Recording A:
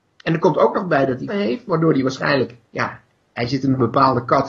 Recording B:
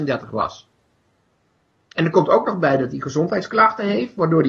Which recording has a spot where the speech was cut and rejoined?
A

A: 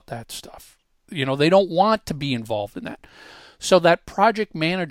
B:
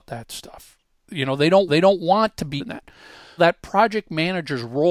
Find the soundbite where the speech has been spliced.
B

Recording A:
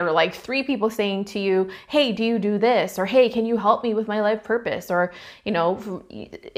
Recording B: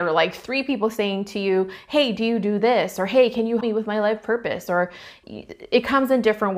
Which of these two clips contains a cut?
B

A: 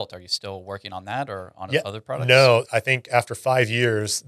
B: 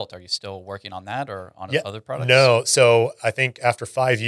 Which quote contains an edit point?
A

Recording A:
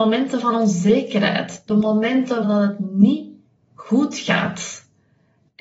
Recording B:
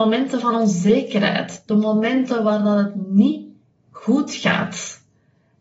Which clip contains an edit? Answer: A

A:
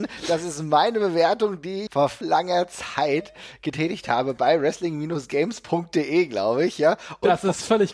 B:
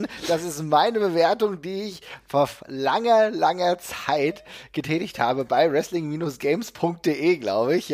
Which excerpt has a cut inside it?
A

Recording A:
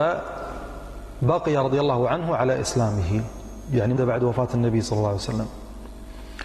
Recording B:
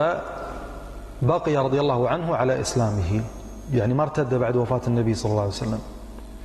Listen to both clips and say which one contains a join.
A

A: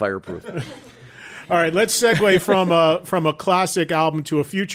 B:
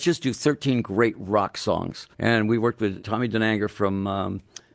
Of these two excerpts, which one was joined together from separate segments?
B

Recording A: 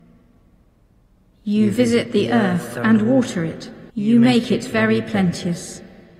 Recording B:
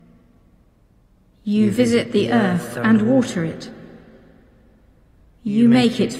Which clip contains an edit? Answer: A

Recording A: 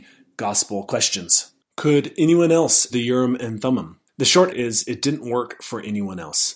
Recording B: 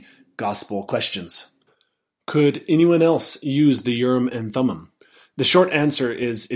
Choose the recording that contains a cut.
A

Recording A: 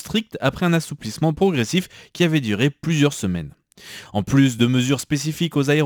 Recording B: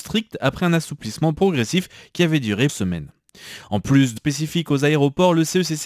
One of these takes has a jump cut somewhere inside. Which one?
B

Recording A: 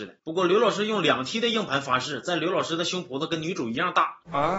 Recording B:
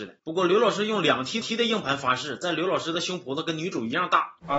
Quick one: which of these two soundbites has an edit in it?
B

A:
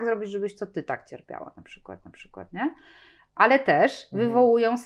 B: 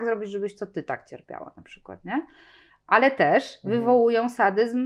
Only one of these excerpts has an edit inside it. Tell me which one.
A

